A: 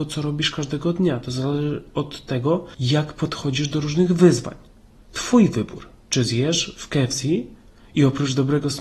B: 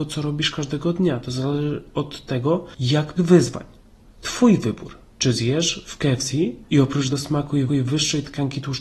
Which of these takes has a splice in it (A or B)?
B